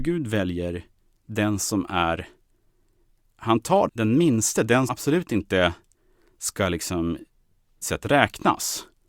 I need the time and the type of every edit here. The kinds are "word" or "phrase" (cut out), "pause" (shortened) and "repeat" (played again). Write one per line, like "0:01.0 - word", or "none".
0:03.9 - word
0:04.9 - word
0:07.8 - word